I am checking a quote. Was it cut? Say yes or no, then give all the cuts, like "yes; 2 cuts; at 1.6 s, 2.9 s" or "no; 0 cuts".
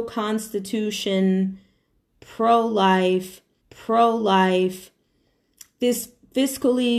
yes; 1 cut; at 3.6 s